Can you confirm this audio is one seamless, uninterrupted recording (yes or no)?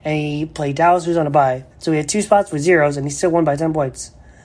no